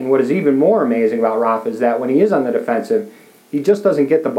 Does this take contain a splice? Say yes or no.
no